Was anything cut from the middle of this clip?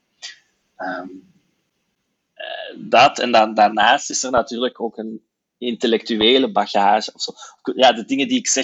no; 0 cuts

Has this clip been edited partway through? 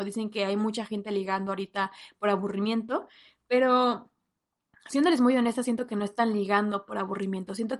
no; 0 cuts

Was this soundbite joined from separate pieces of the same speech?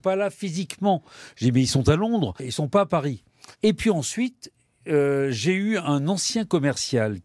yes; 1 cut; at 3.5 s

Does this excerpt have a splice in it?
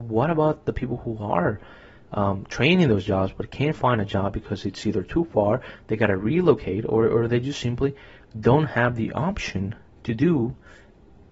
no; 0 cuts

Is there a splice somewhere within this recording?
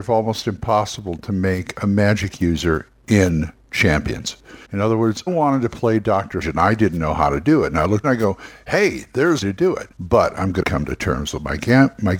yes; 7 cuts; at 4.6 s, 5.3 s, 6.4 s, 8.0 s, 9.4 s, 9.9 s, 10.6 s

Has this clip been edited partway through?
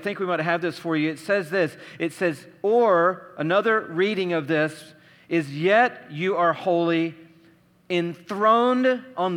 no; 0 cuts

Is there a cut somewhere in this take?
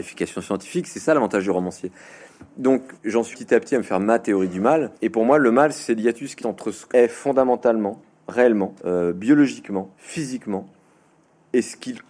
yes; 7 cuts; at 3.0 s, 3.3 s, 5.0 s, 6.4 s, 6.9 s, 8.8 s, 9.9 s

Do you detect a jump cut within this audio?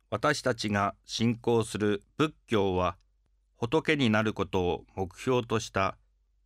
no; 0 cuts

